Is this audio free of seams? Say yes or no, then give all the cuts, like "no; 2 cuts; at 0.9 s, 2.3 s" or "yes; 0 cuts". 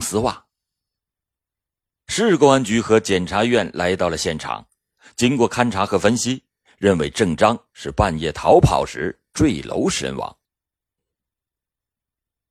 yes; 0 cuts